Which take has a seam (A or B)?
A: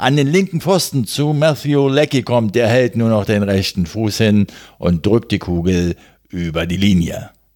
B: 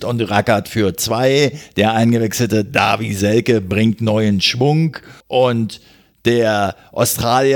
B